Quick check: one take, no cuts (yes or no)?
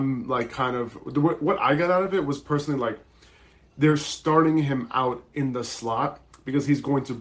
yes